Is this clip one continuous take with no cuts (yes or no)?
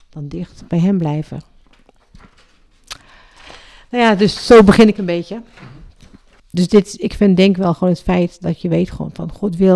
yes